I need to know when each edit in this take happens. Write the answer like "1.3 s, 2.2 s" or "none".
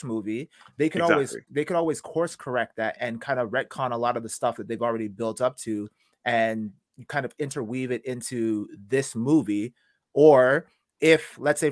3.0 s